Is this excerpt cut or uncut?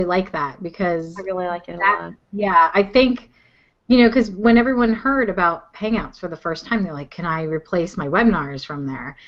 uncut